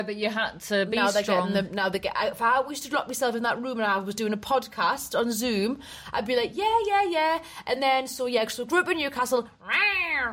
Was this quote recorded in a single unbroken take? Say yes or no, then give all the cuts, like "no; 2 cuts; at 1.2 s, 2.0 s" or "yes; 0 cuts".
yes; 0 cuts